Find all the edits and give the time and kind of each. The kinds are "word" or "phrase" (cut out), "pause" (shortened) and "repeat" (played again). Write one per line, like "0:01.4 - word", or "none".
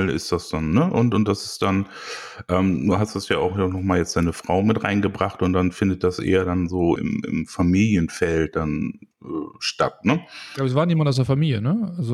0:07.0 - word
0:09.1 - pause